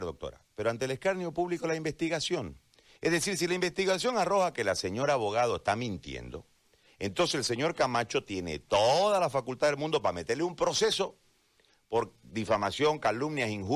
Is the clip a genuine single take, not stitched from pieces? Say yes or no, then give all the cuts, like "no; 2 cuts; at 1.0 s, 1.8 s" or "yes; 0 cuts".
yes; 0 cuts